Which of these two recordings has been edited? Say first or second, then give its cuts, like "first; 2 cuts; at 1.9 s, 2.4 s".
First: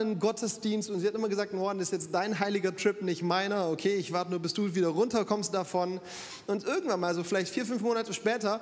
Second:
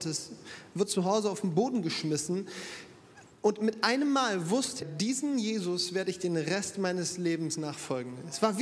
second; 1 cut; at 4.8 s